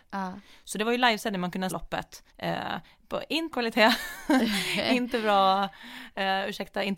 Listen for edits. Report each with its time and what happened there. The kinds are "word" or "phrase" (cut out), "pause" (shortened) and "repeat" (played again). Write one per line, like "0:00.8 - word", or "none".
0:01.7 - word
0:02.3 - pause
0:03.5 - word